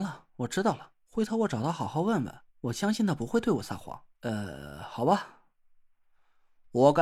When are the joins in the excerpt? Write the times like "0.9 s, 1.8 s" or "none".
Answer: 1.0 s, 2.5 s, 4.1 s